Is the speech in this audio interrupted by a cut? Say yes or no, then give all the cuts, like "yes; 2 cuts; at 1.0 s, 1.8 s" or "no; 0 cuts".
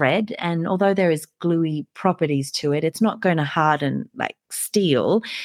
no; 0 cuts